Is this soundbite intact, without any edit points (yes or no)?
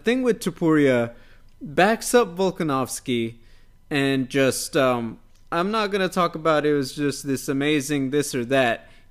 yes